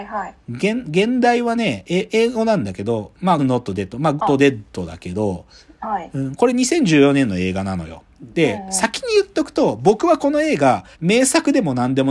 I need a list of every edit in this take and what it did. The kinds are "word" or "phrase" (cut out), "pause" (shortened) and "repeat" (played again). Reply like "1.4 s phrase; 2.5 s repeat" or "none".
3.4 s word; 4.2 s phrase; 8.1 s pause; 10.9 s pause